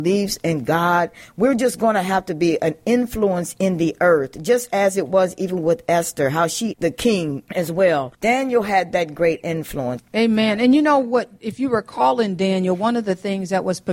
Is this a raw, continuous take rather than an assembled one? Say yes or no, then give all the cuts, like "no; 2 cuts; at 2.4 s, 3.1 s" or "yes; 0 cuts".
no; 1 cut; at 6.7 s